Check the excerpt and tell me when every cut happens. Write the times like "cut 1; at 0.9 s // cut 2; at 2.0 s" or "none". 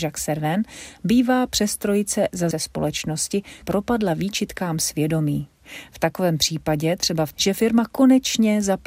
cut 1; at 2.5 s // cut 2; at 3.6 s // cut 3; at 7.3 s